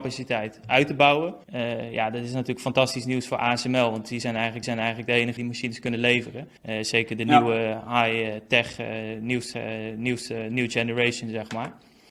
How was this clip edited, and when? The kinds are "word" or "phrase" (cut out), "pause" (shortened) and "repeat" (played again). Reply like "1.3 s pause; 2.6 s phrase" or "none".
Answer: 1.4 s pause; 4.6 s repeat; 5.4 s word; 6.6 s pause; 9.5 s repeat